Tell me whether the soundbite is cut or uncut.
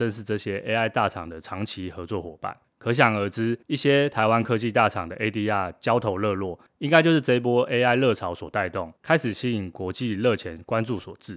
cut